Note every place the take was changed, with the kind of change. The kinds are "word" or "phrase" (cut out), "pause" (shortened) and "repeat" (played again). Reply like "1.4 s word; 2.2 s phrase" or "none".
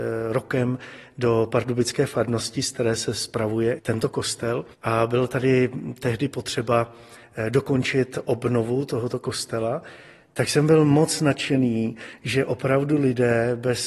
3.8 s word; 4.7 s pause